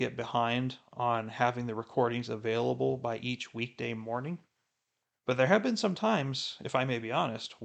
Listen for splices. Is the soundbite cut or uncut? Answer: uncut